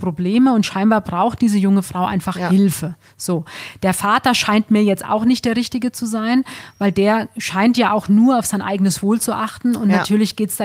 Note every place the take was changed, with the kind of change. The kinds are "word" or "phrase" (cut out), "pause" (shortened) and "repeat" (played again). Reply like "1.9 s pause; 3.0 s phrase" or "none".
none